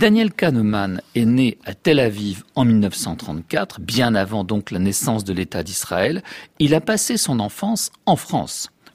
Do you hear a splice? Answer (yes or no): no